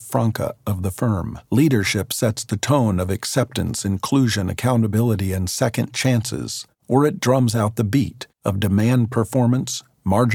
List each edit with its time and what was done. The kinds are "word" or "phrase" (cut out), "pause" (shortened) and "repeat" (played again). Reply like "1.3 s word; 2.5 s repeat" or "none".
1.5 s pause; 6.7 s pause; 8.3 s pause